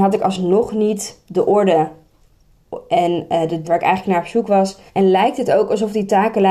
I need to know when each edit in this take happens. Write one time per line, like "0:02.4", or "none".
0:03.6
0:04.9